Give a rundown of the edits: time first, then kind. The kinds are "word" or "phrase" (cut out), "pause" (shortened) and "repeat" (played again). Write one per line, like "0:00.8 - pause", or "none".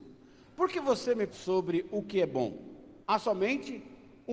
0:01.3 - word
0:03.0 - pause